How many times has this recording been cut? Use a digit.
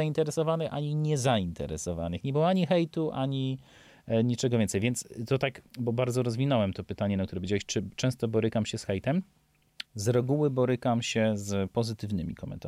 2